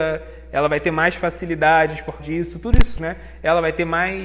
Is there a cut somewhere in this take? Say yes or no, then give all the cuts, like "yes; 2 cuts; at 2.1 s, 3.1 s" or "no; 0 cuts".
yes; 2 cuts; at 2.2 s, 3.0 s